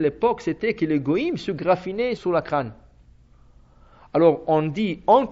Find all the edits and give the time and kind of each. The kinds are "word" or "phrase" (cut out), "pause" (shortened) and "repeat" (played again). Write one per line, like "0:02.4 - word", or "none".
0:02.2 - word